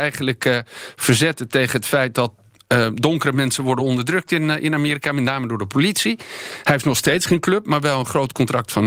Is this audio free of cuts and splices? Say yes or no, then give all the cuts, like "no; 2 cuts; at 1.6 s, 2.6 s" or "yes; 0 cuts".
yes; 0 cuts